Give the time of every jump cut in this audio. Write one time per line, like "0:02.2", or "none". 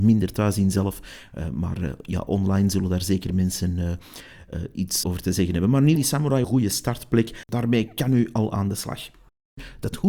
0:05.0
0:06.0
0:06.4